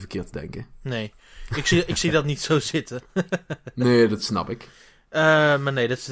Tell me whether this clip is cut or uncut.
uncut